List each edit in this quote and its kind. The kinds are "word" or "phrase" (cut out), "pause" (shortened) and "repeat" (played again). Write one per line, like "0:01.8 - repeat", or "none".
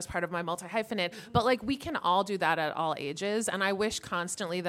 none